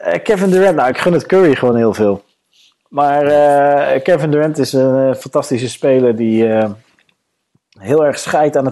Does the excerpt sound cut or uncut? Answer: uncut